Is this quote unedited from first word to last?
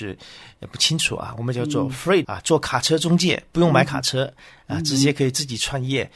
no; 1 cut; at 2.2 s

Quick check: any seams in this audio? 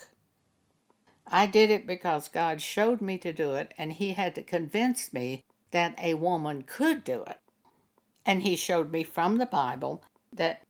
yes; 1 cut; at 7.7 s

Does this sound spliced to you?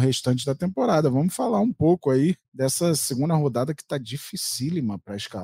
yes; 1 cut; at 2.4 s

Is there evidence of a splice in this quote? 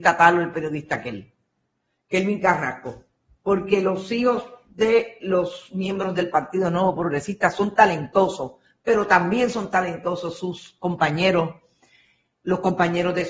no; 0 cuts

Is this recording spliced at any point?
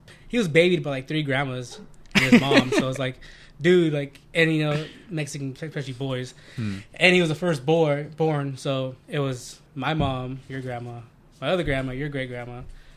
yes; 3 cuts; at 5.6 s, 9.0 s, 9.7 s

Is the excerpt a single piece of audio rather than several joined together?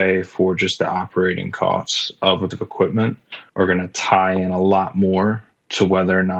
no; 2 cuts; at 2.5 s, 3.5 s

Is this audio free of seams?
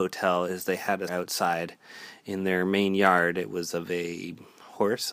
no; 1 cut; at 1.1 s

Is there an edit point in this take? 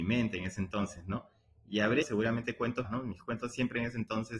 yes; 2 cuts; at 2.0 s, 2.8 s

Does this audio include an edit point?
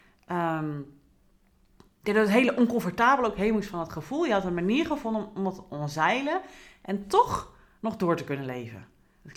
no; 0 cuts

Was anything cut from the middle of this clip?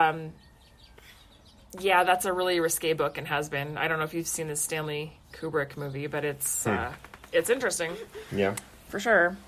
no; 0 cuts

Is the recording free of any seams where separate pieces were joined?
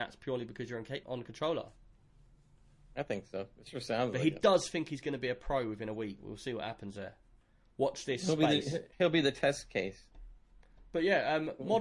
no; 3 cuts; at 1.0 s, 6.2 s, 8.9 s

